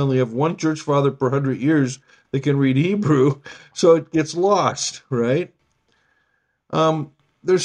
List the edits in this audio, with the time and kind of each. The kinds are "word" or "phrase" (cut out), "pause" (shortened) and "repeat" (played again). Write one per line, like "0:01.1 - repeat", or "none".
none